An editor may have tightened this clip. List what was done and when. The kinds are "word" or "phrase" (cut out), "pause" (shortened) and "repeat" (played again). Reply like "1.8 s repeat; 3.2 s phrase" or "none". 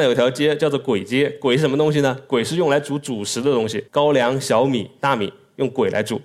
3.9 s pause